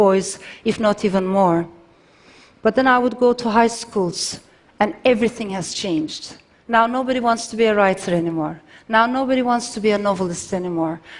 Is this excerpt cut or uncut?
uncut